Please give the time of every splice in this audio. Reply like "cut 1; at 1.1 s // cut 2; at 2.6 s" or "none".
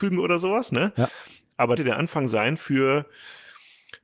cut 1; at 1.8 s

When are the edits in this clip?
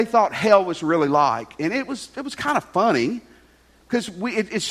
none

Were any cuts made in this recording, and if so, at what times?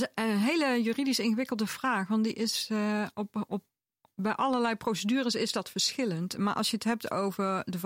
none

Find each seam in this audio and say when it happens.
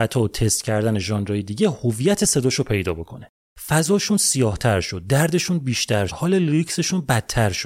cut 1; at 6.1 s

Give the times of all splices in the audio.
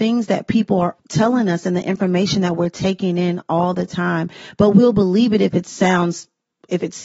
cut 1; at 1.0 s

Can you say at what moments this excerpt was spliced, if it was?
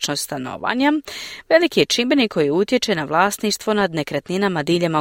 none

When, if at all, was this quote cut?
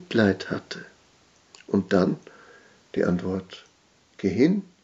none

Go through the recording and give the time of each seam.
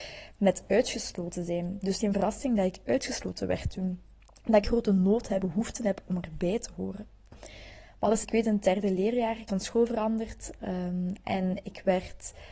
cut 1; at 2.0 s // cut 2; at 4.6 s // cut 3; at 5.4 s // cut 4; at 8.2 s // cut 5; at 9.5 s

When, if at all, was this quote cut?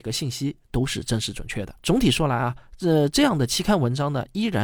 cut 1; at 1.8 s

